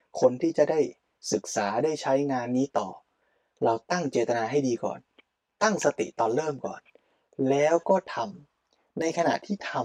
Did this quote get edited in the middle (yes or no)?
no